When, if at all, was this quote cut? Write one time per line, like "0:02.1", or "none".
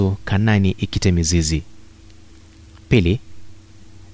none